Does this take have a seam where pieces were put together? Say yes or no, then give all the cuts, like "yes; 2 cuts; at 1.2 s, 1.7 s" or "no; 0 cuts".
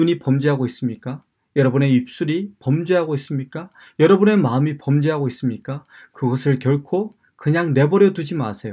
no; 0 cuts